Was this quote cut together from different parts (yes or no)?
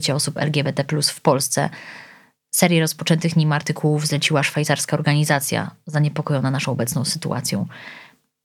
no